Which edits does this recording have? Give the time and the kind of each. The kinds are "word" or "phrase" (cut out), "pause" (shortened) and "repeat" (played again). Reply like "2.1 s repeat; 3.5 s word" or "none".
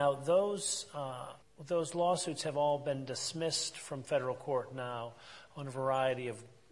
1.4 s pause

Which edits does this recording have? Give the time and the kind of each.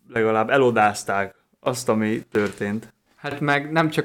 none

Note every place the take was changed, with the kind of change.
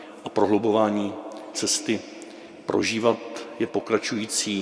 1.5 s word

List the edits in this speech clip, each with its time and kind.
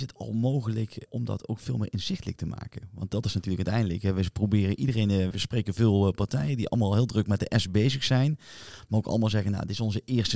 1.1 s word; 5.3 s word

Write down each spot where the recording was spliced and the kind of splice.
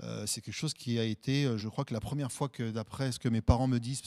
1.6 s word

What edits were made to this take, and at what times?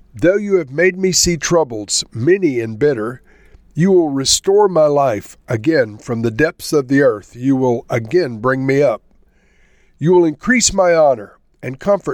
none

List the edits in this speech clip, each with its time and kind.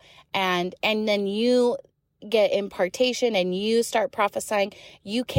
none

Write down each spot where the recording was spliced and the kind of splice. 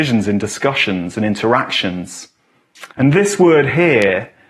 2.9 s pause

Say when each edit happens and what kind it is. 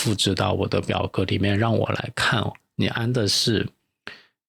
none

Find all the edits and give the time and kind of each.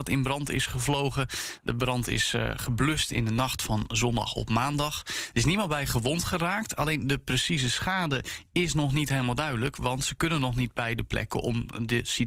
none

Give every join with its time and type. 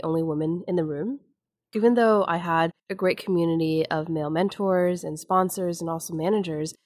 2.8 s pause

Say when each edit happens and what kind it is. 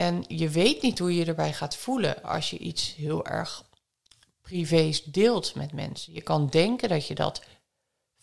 none

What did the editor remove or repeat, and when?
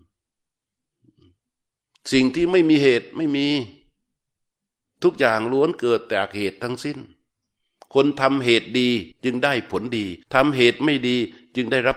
9.1 s pause; 10.2 s pause

